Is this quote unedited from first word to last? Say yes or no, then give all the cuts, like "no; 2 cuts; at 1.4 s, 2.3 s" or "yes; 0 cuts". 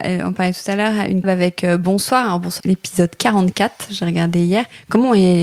no; 2 cuts; at 1.2 s, 2.6 s